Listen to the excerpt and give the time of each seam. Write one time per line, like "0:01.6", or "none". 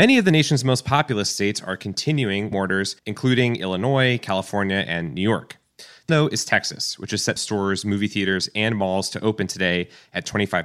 0:02.5
0:03.0
0:06.1
0:07.4